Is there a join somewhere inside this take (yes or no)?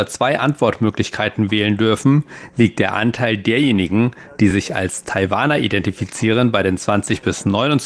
no